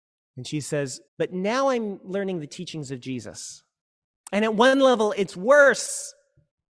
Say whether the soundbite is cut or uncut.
cut